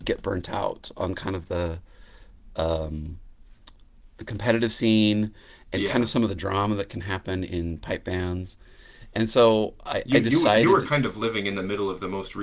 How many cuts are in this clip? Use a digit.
0